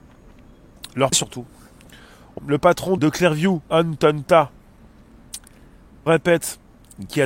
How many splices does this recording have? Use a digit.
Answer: 5